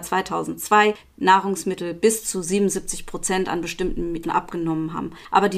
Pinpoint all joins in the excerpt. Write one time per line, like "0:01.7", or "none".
0:04.2